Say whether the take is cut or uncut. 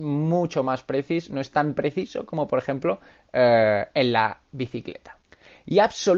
uncut